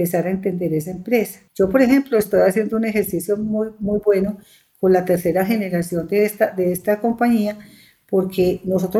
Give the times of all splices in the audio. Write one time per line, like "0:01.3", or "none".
0:01.5